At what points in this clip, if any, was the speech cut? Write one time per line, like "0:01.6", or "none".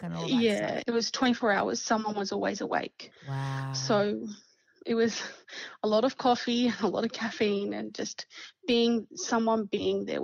none